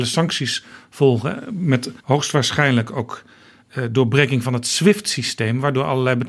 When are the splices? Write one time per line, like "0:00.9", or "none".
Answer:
0:02.0